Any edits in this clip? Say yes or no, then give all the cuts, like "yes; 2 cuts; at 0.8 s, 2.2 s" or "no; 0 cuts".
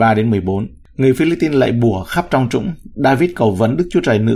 no; 0 cuts